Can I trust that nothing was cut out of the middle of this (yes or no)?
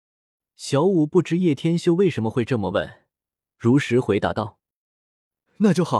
yes